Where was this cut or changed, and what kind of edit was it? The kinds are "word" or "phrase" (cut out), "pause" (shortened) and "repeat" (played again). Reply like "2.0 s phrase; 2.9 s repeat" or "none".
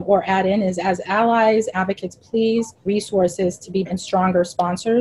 1.7 s word; 2.9 s word; 3.9 s word

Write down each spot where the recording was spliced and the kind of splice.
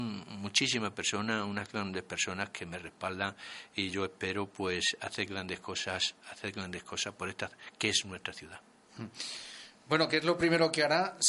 9.7 s pause

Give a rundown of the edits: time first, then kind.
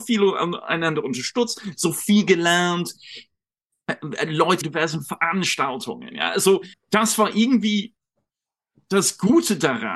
4.6 s phrase; 6.7 s pause

